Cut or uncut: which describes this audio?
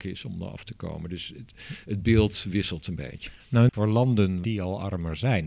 cut